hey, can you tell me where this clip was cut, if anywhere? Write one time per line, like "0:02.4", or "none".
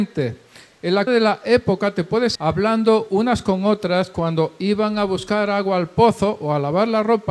0:01.1
0:02.3